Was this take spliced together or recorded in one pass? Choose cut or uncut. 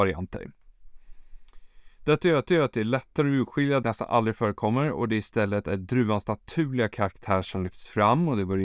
cut